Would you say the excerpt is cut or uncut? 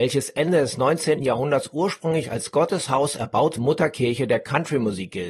cut